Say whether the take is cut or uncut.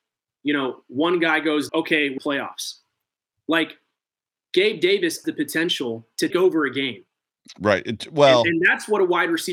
cut